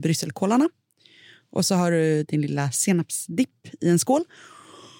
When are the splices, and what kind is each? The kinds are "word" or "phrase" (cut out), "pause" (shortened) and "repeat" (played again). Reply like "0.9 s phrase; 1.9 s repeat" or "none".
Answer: none